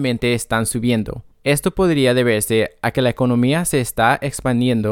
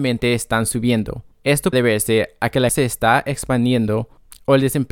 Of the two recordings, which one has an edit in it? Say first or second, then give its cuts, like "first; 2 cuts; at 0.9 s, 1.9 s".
second; 2 cuts; at 1.7 s, 2.7 s